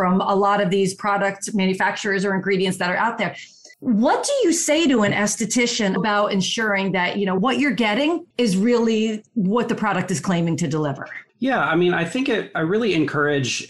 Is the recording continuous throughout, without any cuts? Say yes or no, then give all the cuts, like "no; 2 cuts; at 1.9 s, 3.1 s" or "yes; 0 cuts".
no; 4 cuts; at 3.7 s, 6.0 s, 8.3 s, 11.3 s